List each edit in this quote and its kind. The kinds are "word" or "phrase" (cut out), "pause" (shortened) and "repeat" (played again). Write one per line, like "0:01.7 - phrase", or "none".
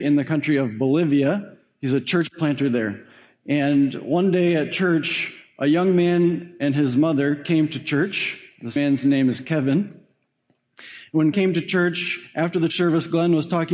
0:08.8 - word
0:11.3 - word
0:12.7 - word